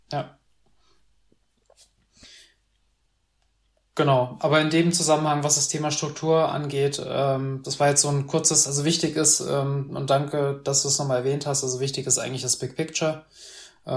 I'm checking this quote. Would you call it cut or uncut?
uncut